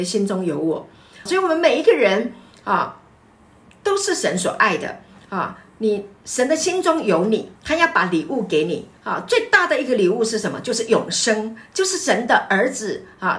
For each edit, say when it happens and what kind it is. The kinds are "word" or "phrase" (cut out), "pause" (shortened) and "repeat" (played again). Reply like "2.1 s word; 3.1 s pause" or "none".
1.3 s word; 7.6 s pause; 9.0 s pause